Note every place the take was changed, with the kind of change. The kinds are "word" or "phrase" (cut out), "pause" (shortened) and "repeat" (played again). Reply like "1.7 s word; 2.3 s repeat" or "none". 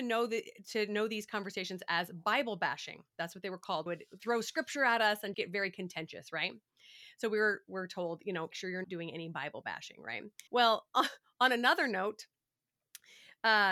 3.9 s phrase; 4.2 s word; 5.3 s word; 8.5 s word; 8.8 s word; 10.5 s pause